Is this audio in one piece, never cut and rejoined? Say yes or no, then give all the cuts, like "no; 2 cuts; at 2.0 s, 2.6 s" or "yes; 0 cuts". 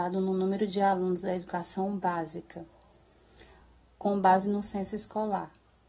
yes; 0 cuts